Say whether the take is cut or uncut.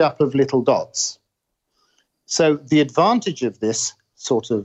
uncut